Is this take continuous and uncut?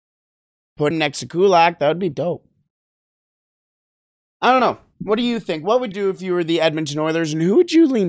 no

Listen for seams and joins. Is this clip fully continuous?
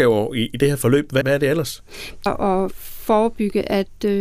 no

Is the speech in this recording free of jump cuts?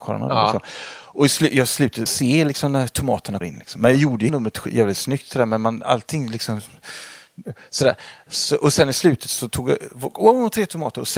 no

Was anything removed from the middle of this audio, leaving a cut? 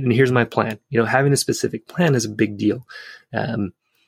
no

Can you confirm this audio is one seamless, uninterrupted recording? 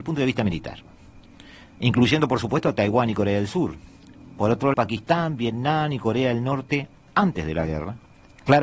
no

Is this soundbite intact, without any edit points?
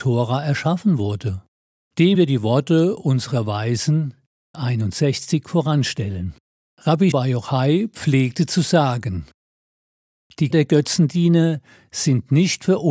no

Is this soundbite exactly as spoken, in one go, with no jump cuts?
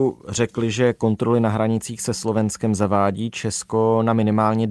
yes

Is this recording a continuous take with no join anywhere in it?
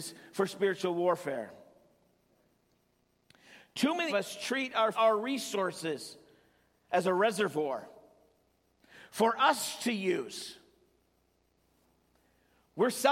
no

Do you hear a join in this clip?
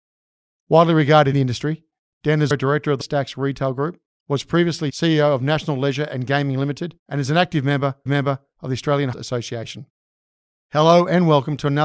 yes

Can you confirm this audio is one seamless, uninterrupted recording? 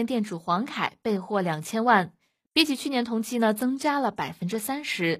yes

